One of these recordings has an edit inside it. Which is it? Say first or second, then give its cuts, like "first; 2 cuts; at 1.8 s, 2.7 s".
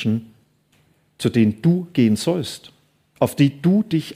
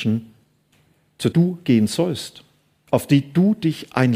second; 1 cut; at 1.3 s